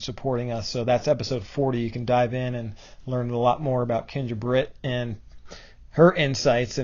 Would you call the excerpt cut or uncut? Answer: uncut